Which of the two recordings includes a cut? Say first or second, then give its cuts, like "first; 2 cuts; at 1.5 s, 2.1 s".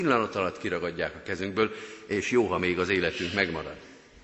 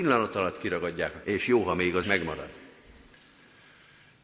second; 2 cuts; at 1.2 s, 2.0 s